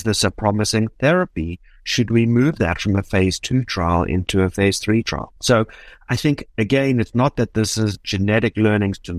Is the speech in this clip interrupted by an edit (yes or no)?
yes